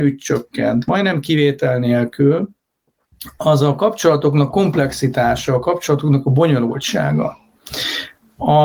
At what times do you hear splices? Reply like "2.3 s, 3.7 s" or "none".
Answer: 4.5 s